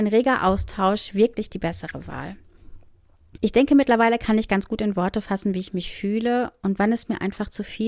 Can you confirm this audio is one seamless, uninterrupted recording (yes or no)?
yes